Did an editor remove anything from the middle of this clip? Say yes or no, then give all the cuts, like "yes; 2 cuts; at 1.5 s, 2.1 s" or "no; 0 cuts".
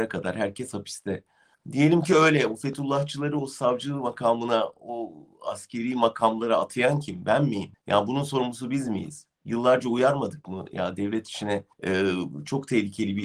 yes; 3 cuts; at 1.5 s, 7.7 s, 11.7 s